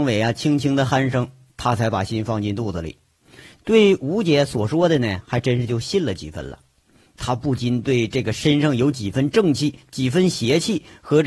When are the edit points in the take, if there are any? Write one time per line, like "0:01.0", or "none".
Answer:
none